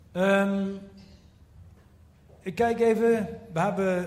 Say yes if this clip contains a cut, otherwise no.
no